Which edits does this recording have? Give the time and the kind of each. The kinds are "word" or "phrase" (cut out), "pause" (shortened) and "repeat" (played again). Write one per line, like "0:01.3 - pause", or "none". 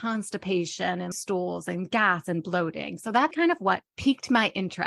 0:01.1 - word
0:03.3 - word